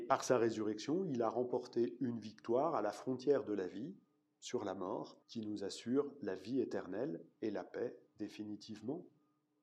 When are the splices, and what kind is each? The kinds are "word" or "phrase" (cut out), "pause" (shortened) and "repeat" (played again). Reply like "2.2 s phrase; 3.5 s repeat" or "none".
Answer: 5.2 s pause

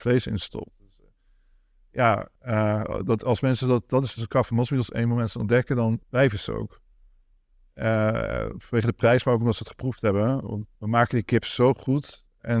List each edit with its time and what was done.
2.4 s pause; 6.0 s pause; 10.7 s pause

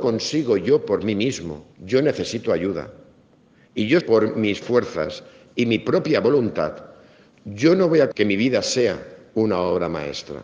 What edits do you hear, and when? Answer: 1.7 s pause; 4.0 s phrase; 4.6 s word; 8.1 s word

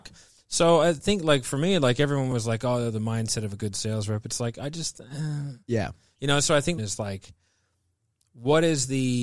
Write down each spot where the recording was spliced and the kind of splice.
5.6 s pause; 6.8 s phrase

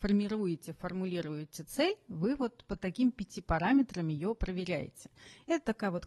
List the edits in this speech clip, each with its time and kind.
none

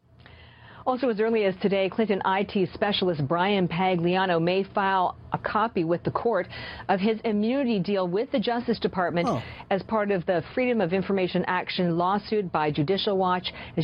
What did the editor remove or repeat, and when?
none

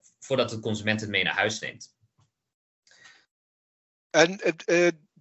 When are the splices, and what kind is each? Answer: none

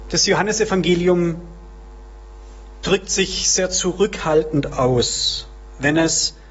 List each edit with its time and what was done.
none

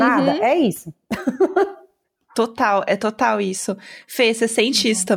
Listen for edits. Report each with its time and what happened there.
none

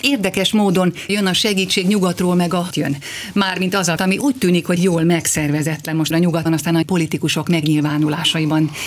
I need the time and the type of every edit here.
1.1 s word; 2.7 s word; 4.0 s word; 4.8 s word; 6.1 s word; 6.5 s word; 6.8 s word

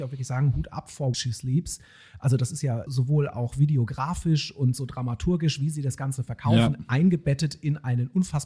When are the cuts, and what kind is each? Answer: 1.1 s word; 2.9 s word

